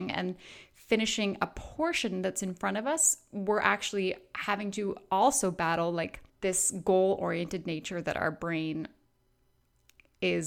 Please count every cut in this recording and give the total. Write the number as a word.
one